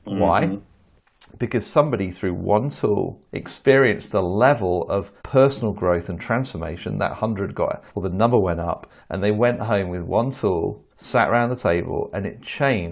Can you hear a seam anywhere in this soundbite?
yes; 5 cuts; at 3.3 s, 5.2 s, 7.9 s, 9.0 s, 10.9 s

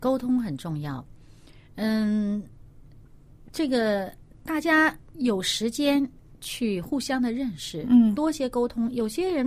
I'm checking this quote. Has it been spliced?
no; 0 cuts

